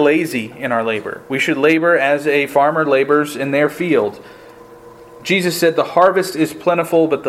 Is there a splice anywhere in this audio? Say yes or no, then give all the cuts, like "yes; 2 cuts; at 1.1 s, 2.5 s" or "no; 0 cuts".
no; 0 cuts